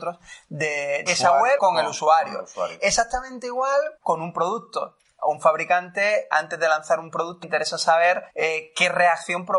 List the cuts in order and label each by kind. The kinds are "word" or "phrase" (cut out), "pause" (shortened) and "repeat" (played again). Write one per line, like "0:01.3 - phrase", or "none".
0:01.1 - word
0:01.6 - word
0:04.0 - pause
0:06.3 - word
0:07.4 - word
0:08.3 - pause